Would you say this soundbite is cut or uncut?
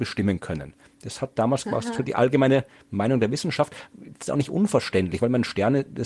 uncut